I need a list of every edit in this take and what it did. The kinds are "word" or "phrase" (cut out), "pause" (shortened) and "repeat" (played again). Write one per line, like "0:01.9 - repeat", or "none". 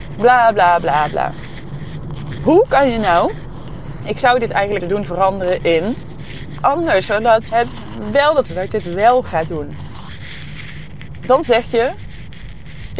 0:04.8 - word
0:06.6 - word
0:07.5 - word
0:08.5 - phrase